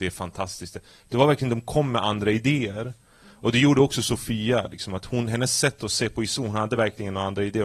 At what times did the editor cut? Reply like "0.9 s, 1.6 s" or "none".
none